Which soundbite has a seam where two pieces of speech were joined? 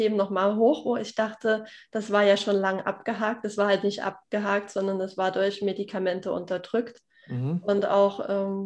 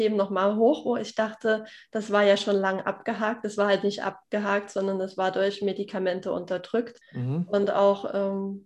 second; 1 cut; at 7.0 s

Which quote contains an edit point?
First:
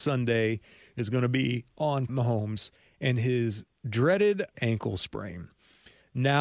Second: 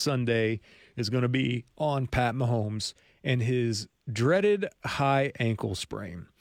first; 2 cuts; at 2.1 s, 4.5 s

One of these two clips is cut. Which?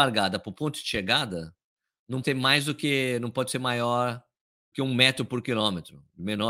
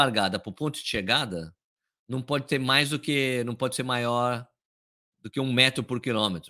first; 2 cuts; at 2.2 s, 4.7 s

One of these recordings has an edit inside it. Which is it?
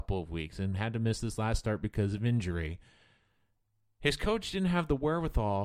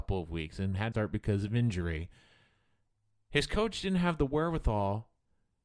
second; 1 cut; at 0.9 s

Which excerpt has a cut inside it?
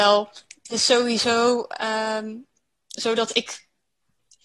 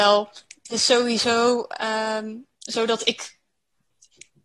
second; 1 cut; at 2.5 s

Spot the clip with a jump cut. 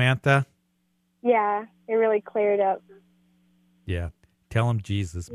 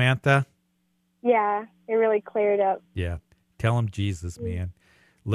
second; 1 cut; at 2.9 s

